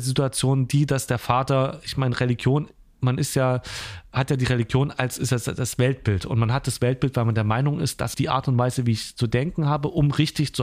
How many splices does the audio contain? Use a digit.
1